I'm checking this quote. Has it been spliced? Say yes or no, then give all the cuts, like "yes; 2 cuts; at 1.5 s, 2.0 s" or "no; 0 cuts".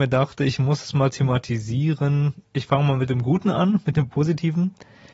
yes; 1 cut; at 2.5 s